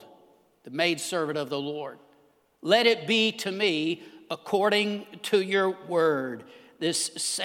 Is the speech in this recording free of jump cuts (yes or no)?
yes